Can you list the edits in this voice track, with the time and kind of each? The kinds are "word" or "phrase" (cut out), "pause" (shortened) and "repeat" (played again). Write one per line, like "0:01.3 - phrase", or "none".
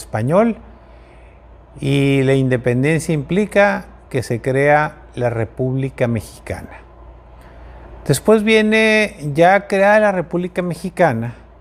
none